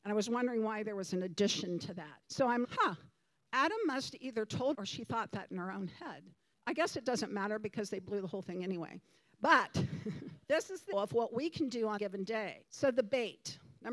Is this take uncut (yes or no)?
no